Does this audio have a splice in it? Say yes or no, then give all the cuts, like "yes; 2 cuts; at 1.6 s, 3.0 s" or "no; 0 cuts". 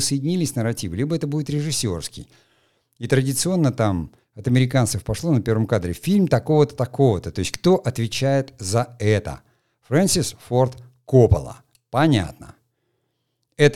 no; 0 cuts